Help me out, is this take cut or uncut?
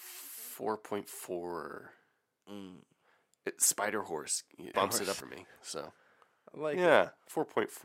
cut